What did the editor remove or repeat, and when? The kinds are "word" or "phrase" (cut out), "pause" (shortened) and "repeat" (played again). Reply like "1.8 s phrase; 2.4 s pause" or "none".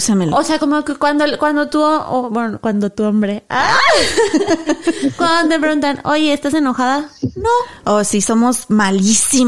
none